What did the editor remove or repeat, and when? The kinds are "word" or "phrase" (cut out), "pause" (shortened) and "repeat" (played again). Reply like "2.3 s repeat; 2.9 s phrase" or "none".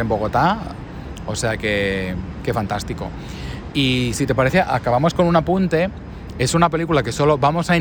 none

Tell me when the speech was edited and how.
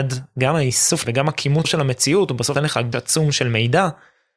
1.0 s word; 1.6 s word; 2.6 s word; 2.9 s word

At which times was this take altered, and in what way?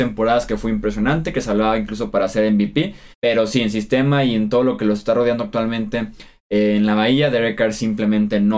3.1 s pause

